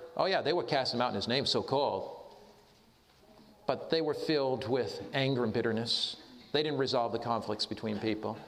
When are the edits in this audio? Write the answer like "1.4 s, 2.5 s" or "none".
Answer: none